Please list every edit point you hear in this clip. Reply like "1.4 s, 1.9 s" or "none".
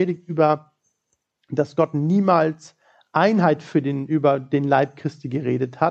none